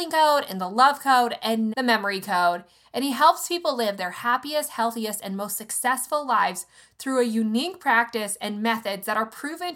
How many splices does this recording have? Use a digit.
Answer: 1